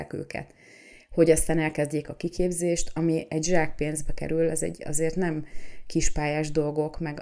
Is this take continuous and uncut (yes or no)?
yes